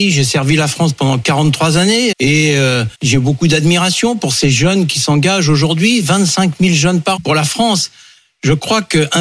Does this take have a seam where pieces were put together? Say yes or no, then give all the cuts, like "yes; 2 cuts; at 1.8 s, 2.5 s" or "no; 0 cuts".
yes; 3 cuts; at 2.1 s, 2.9 s, 7.2 s